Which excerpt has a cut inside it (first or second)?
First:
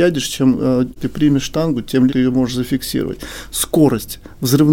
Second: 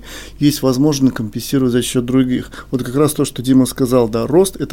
first